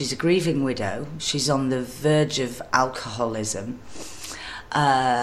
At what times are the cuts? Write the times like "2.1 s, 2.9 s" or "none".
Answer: none